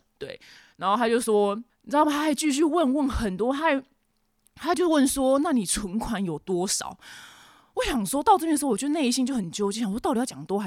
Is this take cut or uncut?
uncut